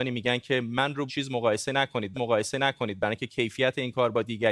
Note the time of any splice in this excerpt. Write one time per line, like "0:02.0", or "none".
0:01.1
0:02.1